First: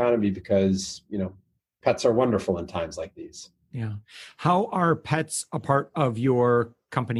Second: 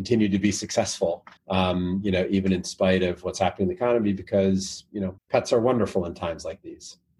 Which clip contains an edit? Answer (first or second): second